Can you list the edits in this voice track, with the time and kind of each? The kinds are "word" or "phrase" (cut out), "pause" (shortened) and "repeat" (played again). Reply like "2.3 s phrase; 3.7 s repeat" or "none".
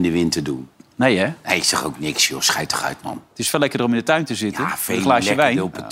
3.3 s pause